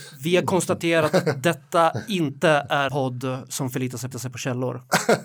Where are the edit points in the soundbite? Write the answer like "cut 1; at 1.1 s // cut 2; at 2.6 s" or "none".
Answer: cut 1; at 2.9 s // cut 2; at 4.1 s